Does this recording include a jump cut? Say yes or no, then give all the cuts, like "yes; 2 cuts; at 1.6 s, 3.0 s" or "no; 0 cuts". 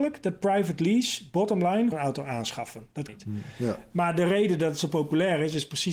yes; 2 cuts; at 1.9 s, 3.1 s